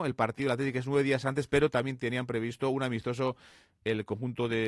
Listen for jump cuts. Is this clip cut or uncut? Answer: uncut